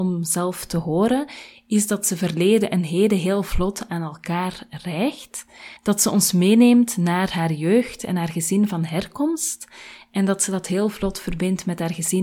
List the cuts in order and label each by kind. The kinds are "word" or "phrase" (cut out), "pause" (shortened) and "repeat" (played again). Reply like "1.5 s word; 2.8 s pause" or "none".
5.8 s pause